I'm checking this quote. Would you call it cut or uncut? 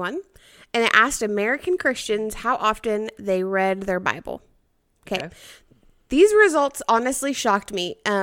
uncut